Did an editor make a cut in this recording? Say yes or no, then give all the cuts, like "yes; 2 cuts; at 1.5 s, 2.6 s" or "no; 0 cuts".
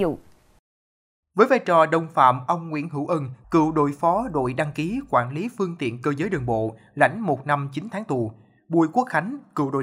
no; 0 cuts